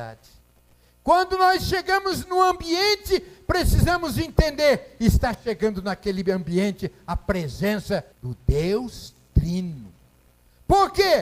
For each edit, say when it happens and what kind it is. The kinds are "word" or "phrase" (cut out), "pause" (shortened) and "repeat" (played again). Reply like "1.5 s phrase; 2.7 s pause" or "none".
8.1 s pause